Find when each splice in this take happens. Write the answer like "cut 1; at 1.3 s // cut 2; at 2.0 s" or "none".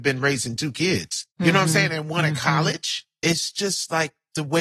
cut 1; at 1.3 s